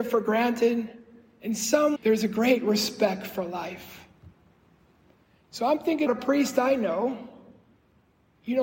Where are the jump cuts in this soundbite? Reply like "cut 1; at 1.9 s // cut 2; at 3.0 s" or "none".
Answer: cut 1; at 2.0 s // cut 2; at 6.1 s